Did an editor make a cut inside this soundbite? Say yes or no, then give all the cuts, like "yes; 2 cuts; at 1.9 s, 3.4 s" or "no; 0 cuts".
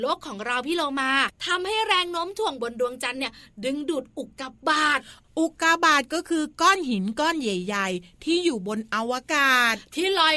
no; 0 cuts